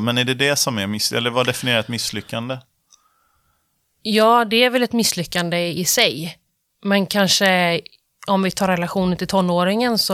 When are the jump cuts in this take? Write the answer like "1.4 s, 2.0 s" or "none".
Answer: none